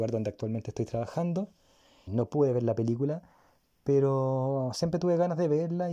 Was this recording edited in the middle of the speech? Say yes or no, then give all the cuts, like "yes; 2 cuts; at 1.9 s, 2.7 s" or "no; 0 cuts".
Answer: yes; 1 cut; at 2.1 s